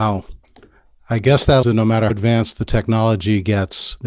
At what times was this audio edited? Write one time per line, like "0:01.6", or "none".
0:01.6
0:02.1